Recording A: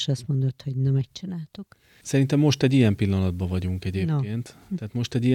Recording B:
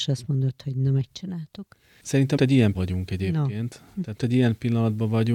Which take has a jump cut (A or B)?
B